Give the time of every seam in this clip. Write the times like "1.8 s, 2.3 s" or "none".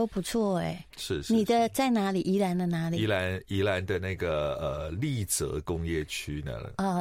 none